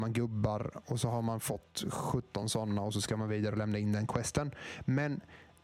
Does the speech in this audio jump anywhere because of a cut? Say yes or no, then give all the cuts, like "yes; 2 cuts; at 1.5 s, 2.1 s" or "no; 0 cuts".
no; 0 cuts